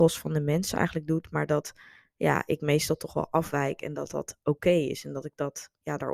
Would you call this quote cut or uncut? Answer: uncut